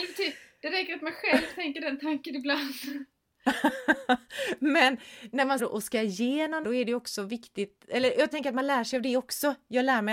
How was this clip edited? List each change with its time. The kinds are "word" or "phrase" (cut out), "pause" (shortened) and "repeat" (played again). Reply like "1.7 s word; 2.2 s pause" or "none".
5.6 s phrase; 6.6 s word; 8.3 s word